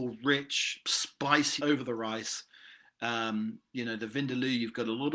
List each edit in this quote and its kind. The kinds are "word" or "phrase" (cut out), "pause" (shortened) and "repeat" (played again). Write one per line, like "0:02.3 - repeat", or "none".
0:01.6 - word

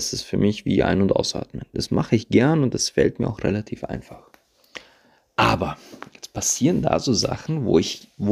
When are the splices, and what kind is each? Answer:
none

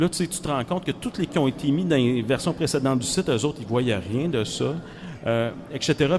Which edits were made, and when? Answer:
0:01.3 - word

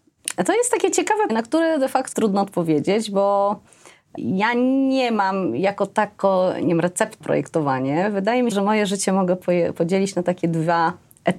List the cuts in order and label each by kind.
0:01.3 - word
0:02.1 - word
0:04.2 - word
0:07.2 - word
0:08.5 - word

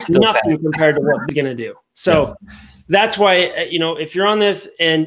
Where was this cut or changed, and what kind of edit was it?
none

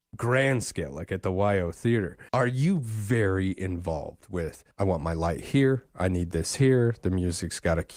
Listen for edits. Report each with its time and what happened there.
0:02.3 - pause
0:04.7 - pause

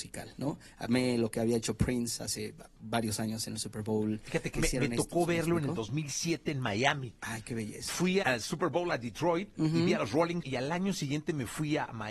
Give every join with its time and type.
0:04.5 - word
0:08.2 - word
0:10.4 - word

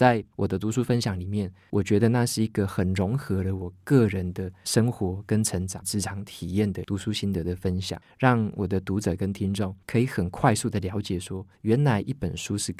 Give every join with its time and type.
0:09.8 - pause
0:11.5 - pause

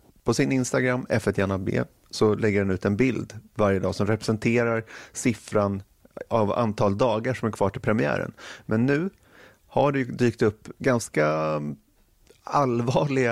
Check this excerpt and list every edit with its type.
none

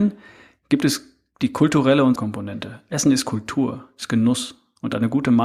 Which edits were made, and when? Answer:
0:02.1 - word

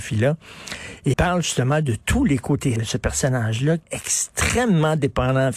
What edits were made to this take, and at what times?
0:01.1 - word
0:02.8 - word
0:03.8 - word

